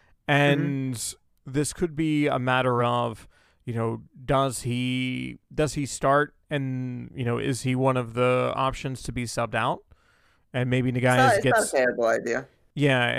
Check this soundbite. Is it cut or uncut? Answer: uncut